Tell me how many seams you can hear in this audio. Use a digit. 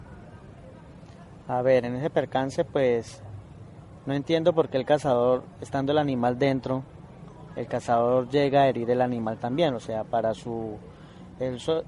0